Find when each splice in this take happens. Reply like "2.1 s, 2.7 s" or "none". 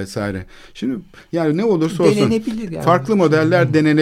none